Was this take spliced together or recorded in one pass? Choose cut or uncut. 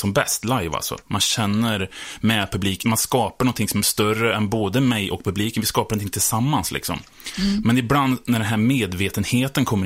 cut